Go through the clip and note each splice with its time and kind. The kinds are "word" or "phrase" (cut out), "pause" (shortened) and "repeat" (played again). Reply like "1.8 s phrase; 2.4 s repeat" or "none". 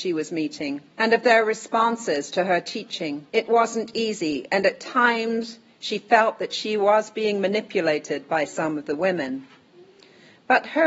0.9 s pause; 3.3 s pause